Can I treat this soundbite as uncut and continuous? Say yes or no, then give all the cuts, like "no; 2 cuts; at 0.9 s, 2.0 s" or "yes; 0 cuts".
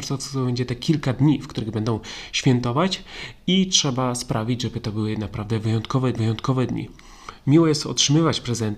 no; 1 cut; at 6.1 s